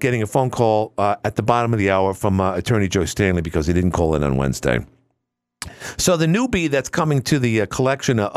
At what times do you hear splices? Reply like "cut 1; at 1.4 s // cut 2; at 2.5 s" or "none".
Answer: none